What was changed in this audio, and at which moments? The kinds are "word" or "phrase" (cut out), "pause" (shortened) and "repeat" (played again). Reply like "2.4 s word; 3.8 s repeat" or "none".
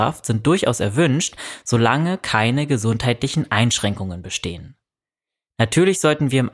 none